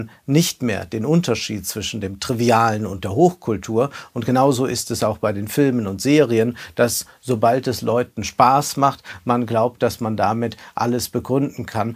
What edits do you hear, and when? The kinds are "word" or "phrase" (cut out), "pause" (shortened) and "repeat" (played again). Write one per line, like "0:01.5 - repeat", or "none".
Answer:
none